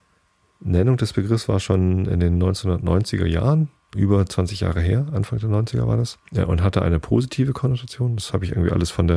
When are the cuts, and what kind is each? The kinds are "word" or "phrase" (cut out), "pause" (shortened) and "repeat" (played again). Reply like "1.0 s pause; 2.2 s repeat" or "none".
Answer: 3.9 s word; 6.3 s pause